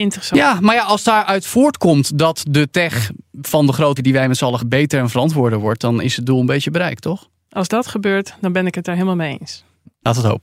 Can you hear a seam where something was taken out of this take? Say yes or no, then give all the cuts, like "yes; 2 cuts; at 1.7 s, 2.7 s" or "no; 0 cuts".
yes; 2 cuts; at 4.0 s, 4.6 s